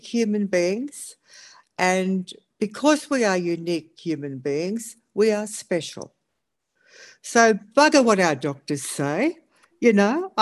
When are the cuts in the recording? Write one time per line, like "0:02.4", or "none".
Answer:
none